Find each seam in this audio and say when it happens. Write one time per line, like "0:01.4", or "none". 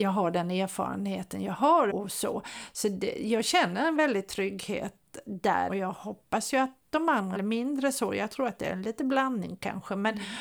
0:01.9
0:05.7
0:07.3